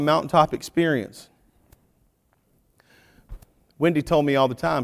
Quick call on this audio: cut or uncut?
uncut